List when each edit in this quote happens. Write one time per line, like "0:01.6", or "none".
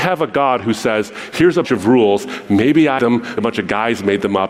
0:01.6
0:03.0
0:03.4